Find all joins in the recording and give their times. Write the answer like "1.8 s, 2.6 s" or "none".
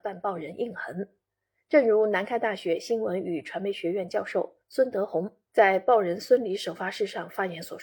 none